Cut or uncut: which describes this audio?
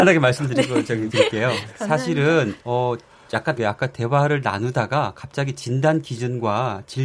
cut